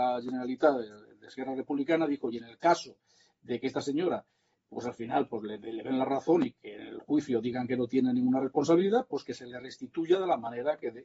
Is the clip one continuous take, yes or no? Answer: yes